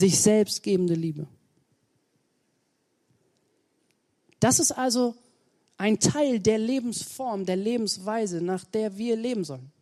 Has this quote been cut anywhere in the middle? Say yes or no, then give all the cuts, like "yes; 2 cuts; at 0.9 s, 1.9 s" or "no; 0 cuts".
no; 0 cuts